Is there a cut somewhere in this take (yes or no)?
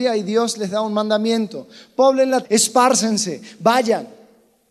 yes